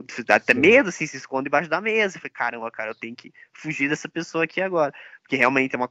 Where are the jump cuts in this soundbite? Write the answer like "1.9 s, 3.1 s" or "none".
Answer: none